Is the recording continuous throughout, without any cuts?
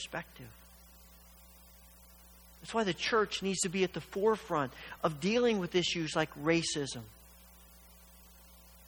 yes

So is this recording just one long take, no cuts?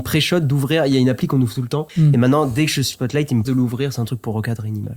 no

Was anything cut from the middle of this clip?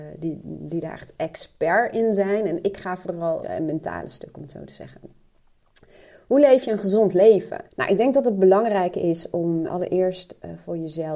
yes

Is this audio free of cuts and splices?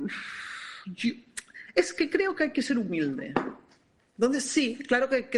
yes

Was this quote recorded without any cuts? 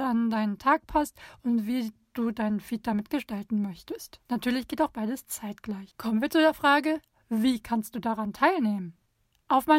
yes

